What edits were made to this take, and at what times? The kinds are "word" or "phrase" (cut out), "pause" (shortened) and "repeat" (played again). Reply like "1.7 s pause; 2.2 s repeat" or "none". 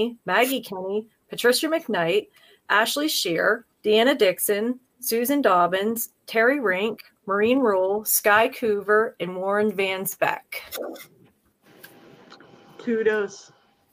3.7 s pause